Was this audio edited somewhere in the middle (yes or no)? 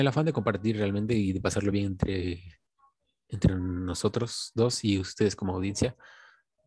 no